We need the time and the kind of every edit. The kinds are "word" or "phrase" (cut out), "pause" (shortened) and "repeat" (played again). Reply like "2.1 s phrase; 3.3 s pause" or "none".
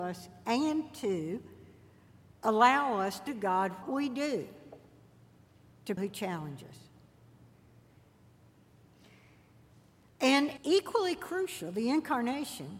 3.3 s word; 3.8 s word; 6.0 s word; 10.6 s word